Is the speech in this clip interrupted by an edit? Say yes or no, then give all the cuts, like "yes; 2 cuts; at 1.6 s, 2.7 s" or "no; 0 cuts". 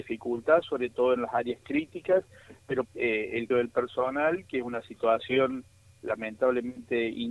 yes; 2 cuts; at 2.8 s, 3.5 s